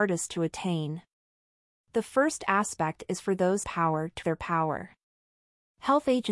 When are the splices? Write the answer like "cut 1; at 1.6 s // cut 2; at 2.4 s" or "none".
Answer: cut 1; at 3.6 s // cut 2; at 4.2 s